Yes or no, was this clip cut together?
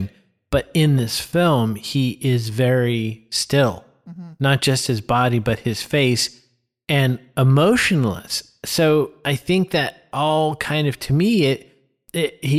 no